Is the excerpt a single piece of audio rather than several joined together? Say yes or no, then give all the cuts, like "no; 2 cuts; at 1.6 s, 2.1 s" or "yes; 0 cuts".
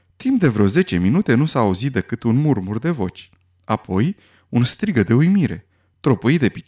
yes; 0 cuts